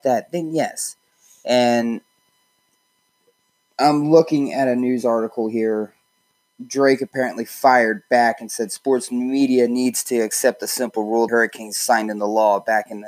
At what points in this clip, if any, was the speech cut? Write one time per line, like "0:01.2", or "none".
0:11.3